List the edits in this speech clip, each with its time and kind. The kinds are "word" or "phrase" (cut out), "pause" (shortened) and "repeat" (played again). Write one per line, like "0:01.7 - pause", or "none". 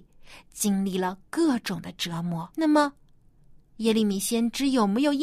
0:02.5 - pause